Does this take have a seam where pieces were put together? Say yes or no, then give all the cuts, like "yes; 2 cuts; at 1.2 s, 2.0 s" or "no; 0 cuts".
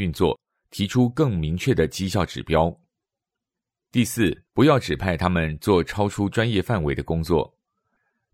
yes; 1 cut; at 4.5 s